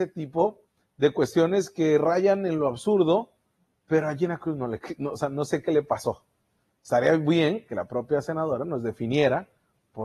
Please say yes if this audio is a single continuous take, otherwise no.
no